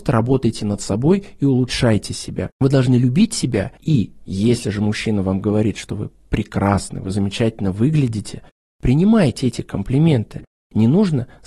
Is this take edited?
no; 0 cuts

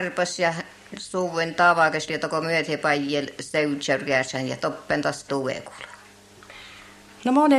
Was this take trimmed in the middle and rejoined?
yes; 2 cuts; at 2.1 s, 5.3 s

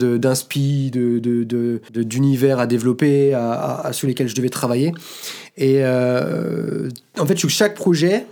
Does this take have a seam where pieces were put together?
yes; 1 cut; at 1.9 s

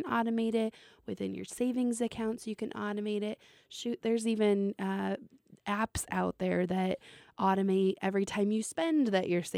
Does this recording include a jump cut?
no; 0 cuts

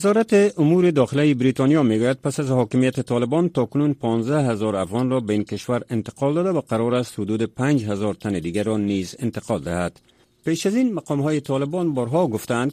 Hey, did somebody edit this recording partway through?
no; 0 cuts

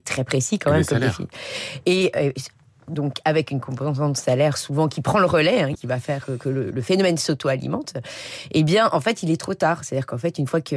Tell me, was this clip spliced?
yes; 1 cut; at 5.7 s

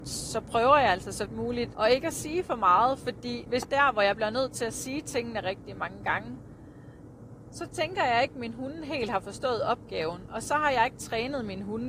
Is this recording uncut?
no; 4 cuts; at 1.3 s, 1.7 s, 3.6 s, 5.4 s

